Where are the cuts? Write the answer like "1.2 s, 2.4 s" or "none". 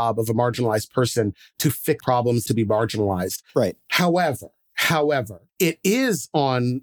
2.0 s, 2.5 s, 3.5 s, 5.5 s